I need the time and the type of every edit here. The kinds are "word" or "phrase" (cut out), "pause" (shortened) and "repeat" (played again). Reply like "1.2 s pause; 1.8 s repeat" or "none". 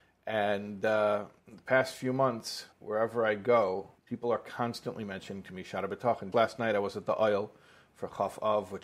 1.4 s pause; 2.7 s pause; 4.0 s pause; 6.3 s word